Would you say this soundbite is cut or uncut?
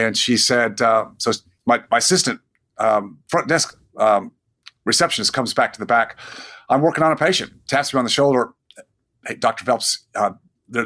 uncut